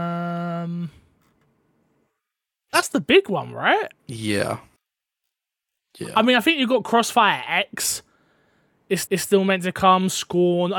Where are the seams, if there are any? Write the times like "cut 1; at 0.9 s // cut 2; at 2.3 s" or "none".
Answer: cut 1; at 2.7 s // cut 2; at 4.0 s // cut 3; at 9.0 s